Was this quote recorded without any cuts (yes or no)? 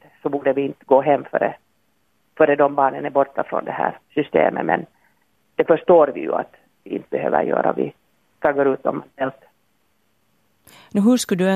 yes